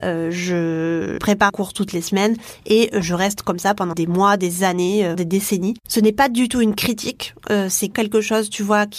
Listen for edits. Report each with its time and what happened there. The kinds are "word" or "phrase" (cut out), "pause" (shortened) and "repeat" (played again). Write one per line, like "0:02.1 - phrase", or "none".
0:01.2 - word
0:01.5 - word
0:03.9 - word
0:05.1 - word
0:07.9 - word